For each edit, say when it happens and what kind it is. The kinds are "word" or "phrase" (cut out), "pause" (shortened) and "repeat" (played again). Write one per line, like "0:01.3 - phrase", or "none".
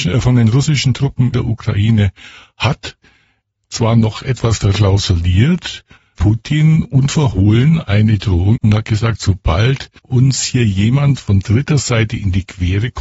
0:01.3 - word
0:06.1 - word
0:08.6 - word
0:10.0 - pause